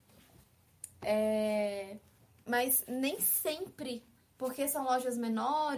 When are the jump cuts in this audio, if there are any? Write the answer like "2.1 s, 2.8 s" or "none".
none